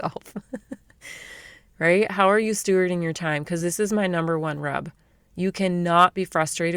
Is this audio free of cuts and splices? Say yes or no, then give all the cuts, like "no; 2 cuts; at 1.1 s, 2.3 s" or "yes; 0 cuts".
yes; 0 cuts